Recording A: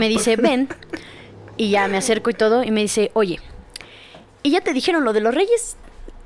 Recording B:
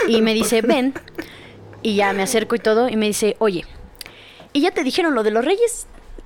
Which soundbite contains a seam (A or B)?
B